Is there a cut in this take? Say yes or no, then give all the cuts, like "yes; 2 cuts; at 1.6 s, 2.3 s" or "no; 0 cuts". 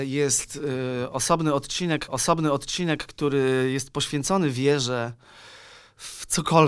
yes; 1 cut; at 2.1 s